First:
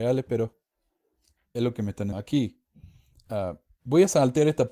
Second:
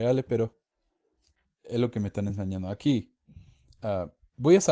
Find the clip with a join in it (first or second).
first